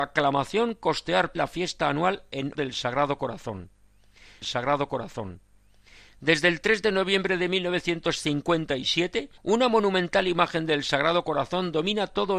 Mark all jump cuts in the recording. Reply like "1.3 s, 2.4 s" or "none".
1.3 s, 2.5 s, 4.4 s, 9.4 s